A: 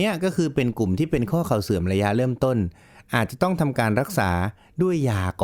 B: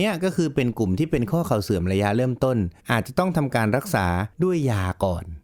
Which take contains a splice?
B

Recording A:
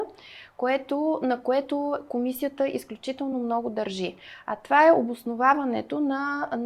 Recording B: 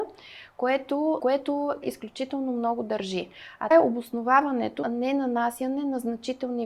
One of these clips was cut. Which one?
B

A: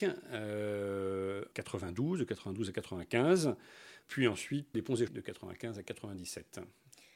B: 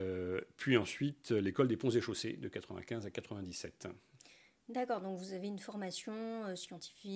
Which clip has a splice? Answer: A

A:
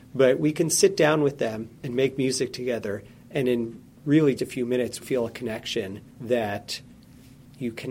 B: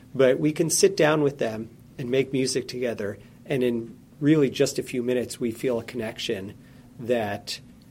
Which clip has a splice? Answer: A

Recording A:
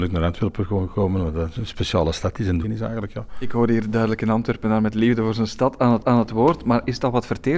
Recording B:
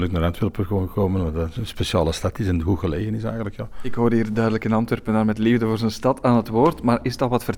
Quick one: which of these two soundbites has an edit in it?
A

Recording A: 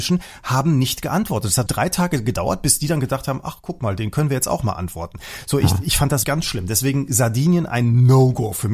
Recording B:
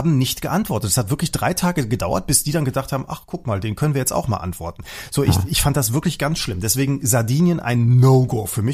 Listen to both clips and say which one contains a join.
A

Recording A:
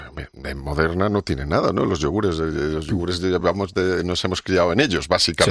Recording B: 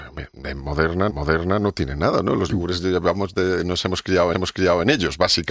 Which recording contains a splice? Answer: B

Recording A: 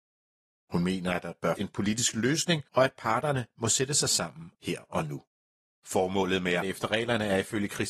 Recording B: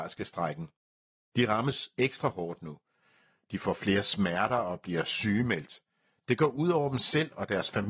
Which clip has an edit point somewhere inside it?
A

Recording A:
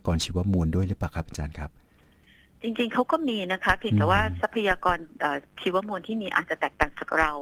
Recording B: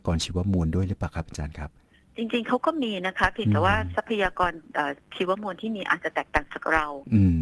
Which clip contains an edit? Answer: B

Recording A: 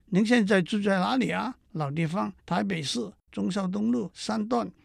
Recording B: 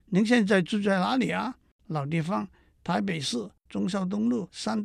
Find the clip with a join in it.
A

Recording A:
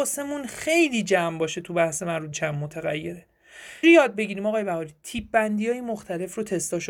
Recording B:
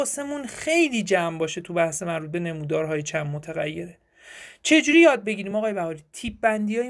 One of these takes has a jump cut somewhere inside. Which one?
A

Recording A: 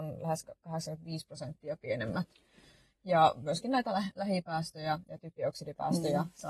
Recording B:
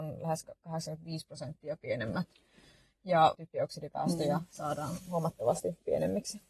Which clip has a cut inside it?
B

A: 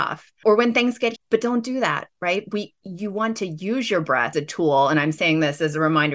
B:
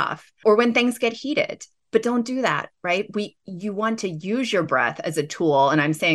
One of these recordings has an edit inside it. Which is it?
A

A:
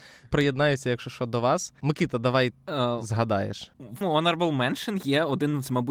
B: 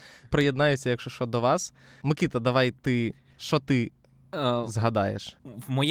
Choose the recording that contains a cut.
A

